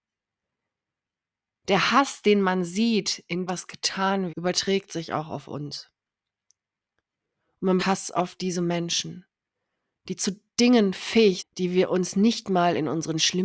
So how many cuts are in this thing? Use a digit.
4